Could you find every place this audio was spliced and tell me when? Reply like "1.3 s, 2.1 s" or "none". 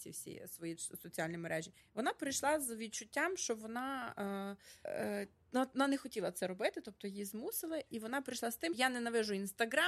1.8 s, 4.9 s, 8.7 s